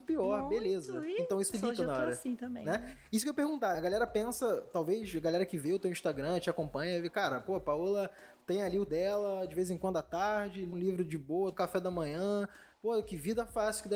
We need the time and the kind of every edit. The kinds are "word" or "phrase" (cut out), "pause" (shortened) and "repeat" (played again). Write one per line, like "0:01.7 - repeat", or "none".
0:01.5 - word
0:03.7 - word
0:08.9 - word
0:10.7 - word
0:11.5 - word